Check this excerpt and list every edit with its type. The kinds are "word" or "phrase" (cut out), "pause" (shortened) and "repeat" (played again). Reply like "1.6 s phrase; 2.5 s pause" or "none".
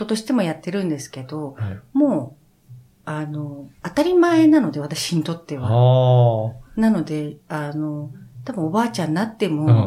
3.7 s pause